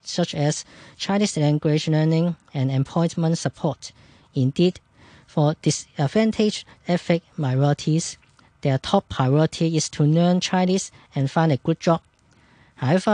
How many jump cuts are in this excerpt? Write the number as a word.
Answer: zero